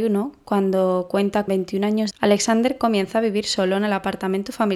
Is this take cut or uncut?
cut